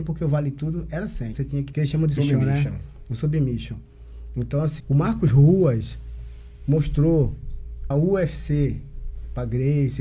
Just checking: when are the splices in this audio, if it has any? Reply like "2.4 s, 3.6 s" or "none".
1.3 s, 1.7 s, 2.2 s, 4.8 s, 7.9 s